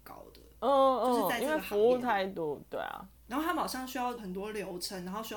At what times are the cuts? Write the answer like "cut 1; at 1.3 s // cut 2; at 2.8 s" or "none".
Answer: cut 1; at 3.2 s // cut 2; at 4.2 s

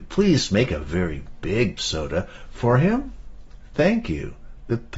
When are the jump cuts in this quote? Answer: cut 1; at 1.8 s

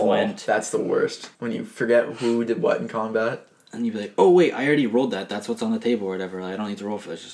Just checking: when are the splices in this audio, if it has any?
cut 1; at 1.3 s

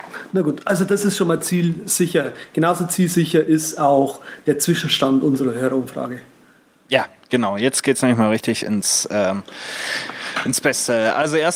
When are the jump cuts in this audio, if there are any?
none

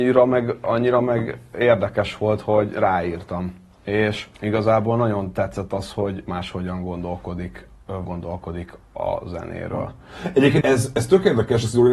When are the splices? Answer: cut 1; at 4.3 s // cut 2; at 6.3 s // cut 3; at 8.0 s // cut 4; at 10.6 s

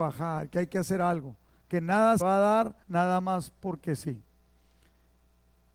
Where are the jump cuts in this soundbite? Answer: cut 1; at 2.2 s // cut 2; at 2.8 s

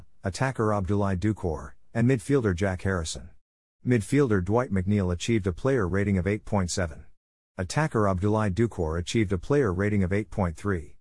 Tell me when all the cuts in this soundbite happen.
none

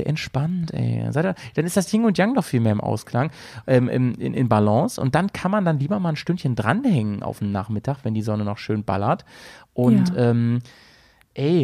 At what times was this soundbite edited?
none

